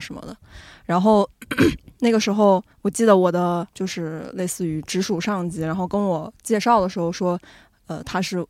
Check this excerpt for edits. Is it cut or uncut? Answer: cut